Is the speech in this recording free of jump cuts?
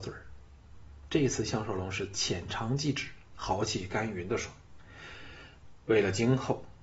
no; 1 cut; at 3.3 s

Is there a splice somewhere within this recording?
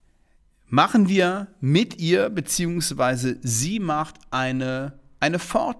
no; 0 cuts

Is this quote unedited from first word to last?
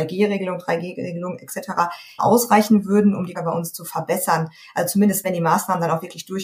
no; 3 cuts; at 2.2 s, 3.3 s, 5.2 s

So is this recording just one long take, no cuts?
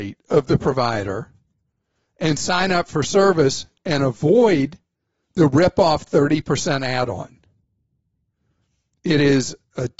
yes; 0 cuts

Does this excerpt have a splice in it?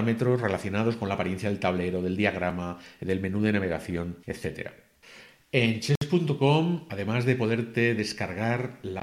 yes; 1 cut; at 4.2 s

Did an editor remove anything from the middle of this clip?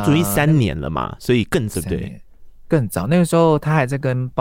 yes; 1 cut; at 1.7 s

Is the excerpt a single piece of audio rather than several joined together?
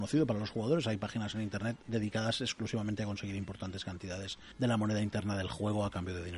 no; 1 cut; at 4.5 s

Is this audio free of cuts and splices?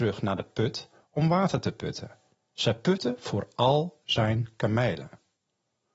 yes; 0 cuts

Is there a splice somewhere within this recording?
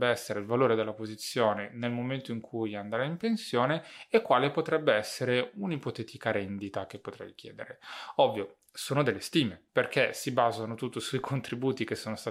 yes; 1 cut; at 9.7 s

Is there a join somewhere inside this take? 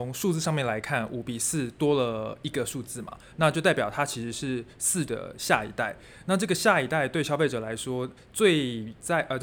yes; 2 cuts; at 5.1 s, 8.2 s

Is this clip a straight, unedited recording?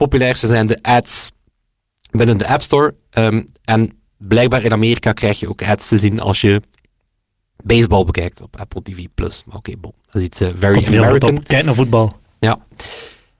yes; 0 cuts

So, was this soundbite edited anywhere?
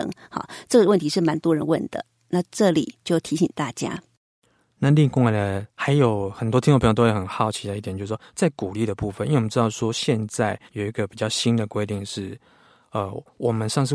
yes; 1 cut; at 10.7 s

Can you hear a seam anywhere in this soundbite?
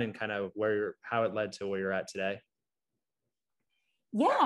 no; 0 cuts

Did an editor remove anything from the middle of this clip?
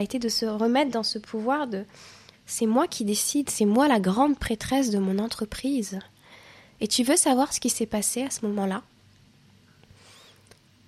no; 0 cuts

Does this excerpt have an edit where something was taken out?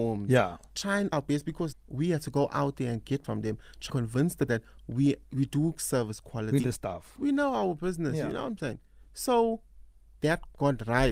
yes; 7 cuts; at 1.1 s, 1.7 s, 3.2 s, 3.9 s, 4.5 s, 6.6 s, 10.2 s

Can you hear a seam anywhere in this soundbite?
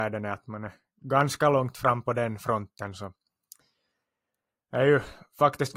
no; 0 cuts

